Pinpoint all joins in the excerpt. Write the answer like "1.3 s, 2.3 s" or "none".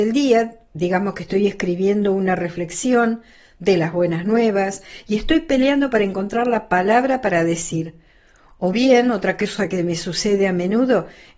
none

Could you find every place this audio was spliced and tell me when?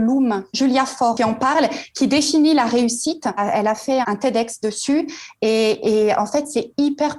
4.0 s

